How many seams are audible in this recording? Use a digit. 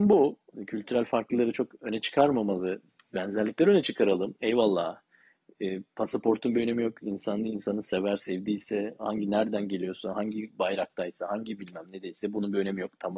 0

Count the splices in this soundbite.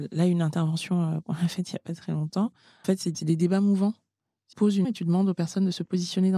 4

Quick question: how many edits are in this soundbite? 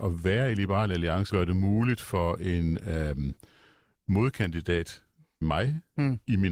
2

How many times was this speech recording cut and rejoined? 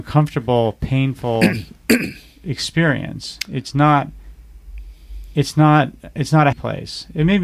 1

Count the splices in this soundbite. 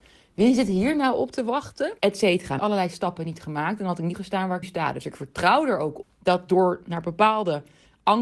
5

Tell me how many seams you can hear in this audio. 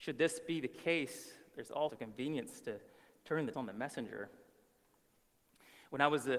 2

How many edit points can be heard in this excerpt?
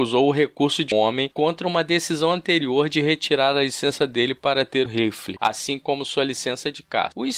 2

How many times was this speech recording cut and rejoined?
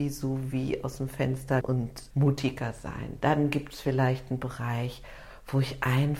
2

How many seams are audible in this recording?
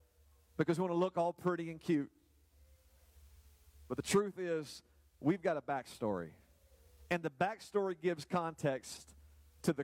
0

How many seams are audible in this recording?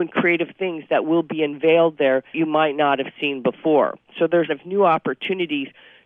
2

